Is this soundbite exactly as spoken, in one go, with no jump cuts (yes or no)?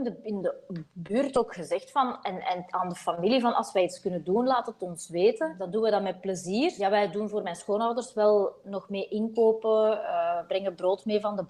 yes